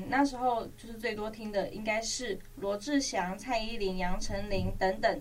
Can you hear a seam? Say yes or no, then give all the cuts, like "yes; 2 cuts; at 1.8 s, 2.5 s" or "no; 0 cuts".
no; 0 cuts